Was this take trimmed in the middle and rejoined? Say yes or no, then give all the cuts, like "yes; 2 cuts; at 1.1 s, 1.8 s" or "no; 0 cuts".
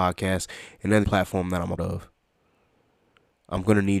yes; 2 cuts; at 1.0 s, 1.8 s